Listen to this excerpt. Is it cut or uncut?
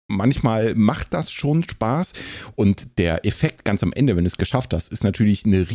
uncut